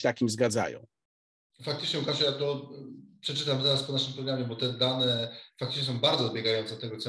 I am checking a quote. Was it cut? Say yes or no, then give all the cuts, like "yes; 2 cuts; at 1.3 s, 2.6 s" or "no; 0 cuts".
no; 0 cuts